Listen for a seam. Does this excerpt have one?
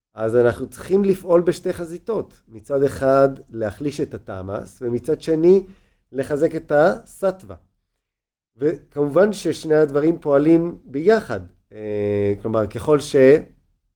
no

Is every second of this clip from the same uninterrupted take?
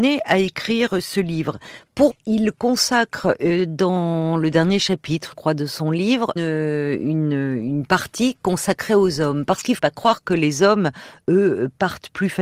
no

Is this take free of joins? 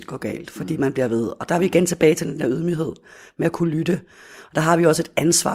yes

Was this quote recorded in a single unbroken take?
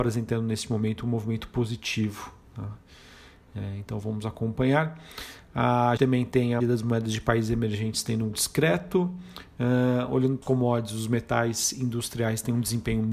no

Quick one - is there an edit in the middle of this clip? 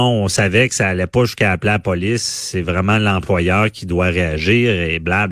no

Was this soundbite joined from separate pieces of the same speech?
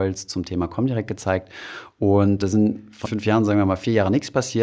yes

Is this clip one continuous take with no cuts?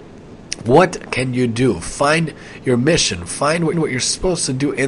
no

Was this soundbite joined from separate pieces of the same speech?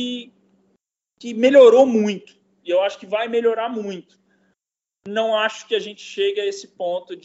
no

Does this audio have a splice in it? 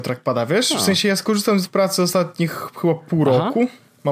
yes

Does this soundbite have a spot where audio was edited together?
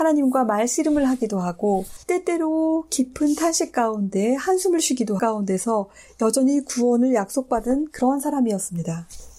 yes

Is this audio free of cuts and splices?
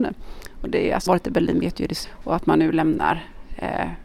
no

